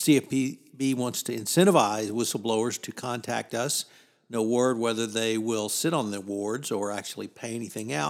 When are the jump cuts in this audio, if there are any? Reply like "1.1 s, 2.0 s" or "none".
none